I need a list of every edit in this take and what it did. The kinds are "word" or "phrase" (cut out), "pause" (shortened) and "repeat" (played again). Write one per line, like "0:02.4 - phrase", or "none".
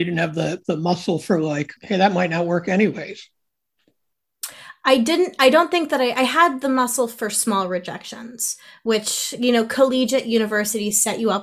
0:01.8 - pause